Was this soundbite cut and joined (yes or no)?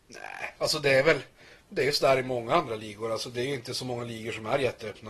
no